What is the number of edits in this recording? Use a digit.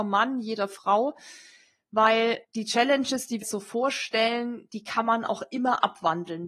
2